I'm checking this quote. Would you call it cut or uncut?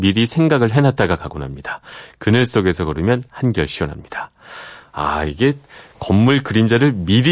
uncut